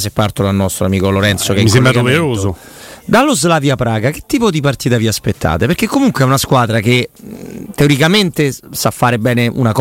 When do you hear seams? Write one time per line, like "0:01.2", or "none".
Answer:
none